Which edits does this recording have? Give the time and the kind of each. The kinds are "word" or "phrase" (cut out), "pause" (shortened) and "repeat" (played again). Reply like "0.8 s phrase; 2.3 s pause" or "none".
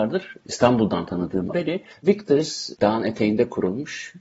1.5 s word; 2.7 s phrase